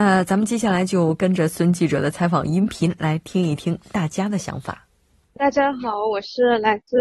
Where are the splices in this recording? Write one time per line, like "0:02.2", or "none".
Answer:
0:05.2